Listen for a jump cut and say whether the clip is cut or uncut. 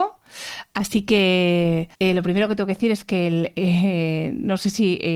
cut